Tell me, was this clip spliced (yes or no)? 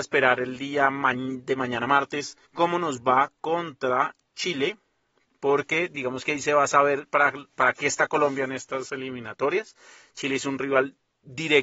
yes